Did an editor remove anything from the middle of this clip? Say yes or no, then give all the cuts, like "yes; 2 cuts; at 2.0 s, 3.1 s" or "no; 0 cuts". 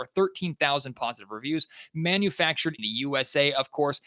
yes; 1 cut; at 2.8 s